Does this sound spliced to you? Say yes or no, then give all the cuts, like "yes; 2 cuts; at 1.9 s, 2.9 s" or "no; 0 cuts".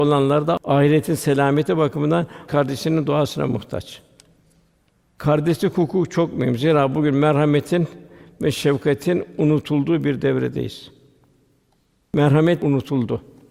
yes; 1 cut; at 2.5 s